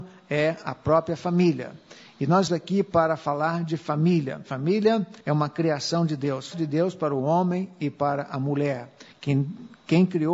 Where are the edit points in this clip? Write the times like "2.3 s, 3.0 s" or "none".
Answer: 2.5 s, 5.2 s, 6.5 s